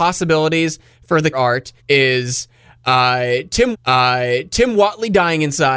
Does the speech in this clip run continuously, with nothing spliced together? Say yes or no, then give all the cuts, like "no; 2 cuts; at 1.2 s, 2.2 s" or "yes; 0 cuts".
no; 3 cuts; at 1.3 s, 1.8 s, 3.7 s